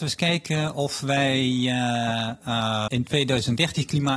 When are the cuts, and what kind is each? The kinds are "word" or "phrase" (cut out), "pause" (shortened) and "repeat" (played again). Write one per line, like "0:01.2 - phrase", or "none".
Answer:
0:02.9 - word